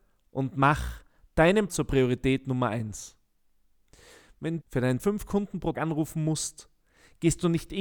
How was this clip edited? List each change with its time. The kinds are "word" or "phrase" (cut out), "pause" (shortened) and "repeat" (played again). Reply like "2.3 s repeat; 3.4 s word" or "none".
1.7 s word; 4.6 s word; 5.0 s word; 5.7 s word